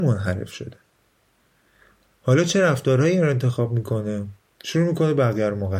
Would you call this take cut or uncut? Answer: uncut